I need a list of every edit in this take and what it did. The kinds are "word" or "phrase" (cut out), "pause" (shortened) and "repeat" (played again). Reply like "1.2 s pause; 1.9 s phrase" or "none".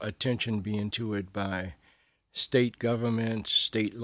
0.9 s word